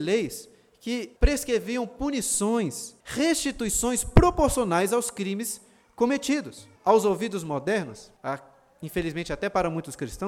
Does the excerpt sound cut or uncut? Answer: cut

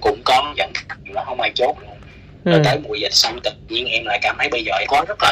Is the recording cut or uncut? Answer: cut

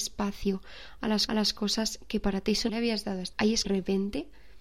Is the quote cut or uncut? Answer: cut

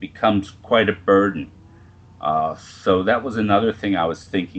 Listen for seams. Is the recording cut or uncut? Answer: uncut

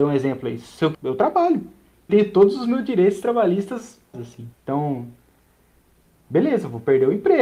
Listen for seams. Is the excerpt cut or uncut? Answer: cut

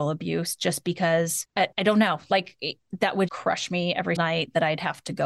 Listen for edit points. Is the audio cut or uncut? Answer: cut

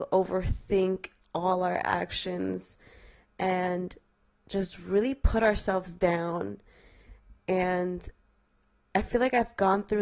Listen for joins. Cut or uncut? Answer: uncut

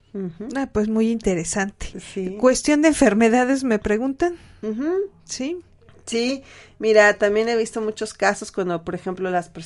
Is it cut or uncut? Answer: uncut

